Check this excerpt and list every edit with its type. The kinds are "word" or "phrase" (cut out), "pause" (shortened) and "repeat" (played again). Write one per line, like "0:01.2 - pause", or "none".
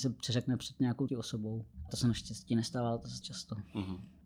0:01.1 - word
0:01.9 - word
0:03.2 - word